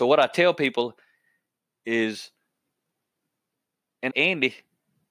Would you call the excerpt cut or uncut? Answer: cut